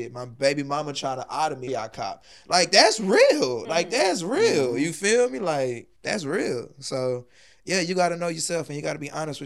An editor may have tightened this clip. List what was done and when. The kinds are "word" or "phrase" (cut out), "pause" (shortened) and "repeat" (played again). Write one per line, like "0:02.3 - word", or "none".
0:01.7 - phrase
0:06.0 - pause

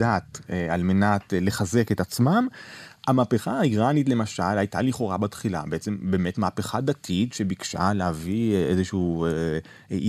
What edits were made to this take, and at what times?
none

